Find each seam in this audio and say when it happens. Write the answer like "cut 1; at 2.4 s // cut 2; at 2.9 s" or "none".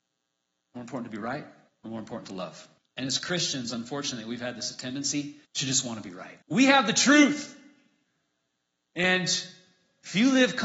cut 1; at 1.7 s // cut 2; at 2.8 s // cut 3; at 5.4 s // cut 4; at 6.4 s